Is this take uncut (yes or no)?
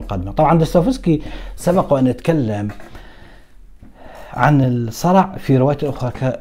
yes